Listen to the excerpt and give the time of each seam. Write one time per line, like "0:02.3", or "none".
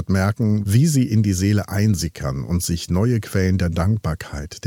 none